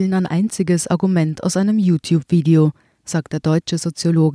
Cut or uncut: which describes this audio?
uncut